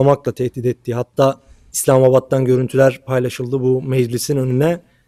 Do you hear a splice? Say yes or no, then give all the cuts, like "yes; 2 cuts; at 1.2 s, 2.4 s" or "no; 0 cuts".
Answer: no; 0 cuts